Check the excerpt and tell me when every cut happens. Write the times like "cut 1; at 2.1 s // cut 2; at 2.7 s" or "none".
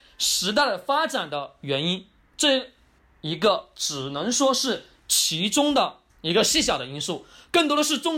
cut 1; at 6.1 s